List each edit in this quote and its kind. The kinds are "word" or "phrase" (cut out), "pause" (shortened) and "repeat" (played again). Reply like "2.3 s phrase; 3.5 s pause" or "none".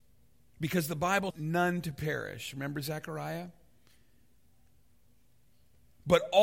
1.3 s phrase